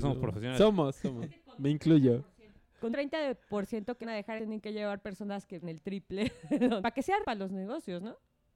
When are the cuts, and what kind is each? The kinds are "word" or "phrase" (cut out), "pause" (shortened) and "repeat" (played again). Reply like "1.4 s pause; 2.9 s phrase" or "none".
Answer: 1.0 s word; 2.9 s word; 4.0 s word; 4.4 s word; 5.6 s word; 6.8 s word; 7.2 s word